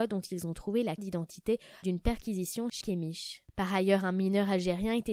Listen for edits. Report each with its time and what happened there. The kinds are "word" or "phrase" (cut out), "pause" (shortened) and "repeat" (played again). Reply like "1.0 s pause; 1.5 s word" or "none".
1.0 s word; 1.8 s word; 2.8 s word